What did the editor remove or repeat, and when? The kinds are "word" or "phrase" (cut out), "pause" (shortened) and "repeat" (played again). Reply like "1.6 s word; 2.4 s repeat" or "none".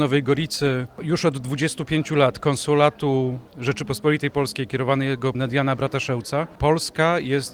3.5 s pause; 5.3 s phrase